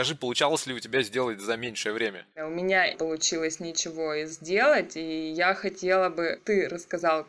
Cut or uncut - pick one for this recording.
cut